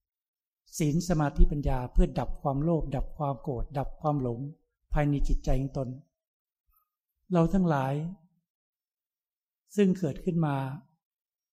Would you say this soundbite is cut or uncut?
uncut